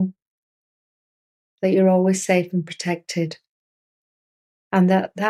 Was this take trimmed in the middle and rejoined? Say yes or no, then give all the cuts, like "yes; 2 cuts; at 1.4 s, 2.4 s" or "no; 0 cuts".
no; 0 cuts